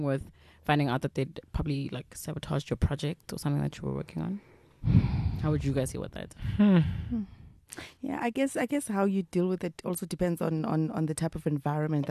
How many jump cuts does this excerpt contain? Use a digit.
0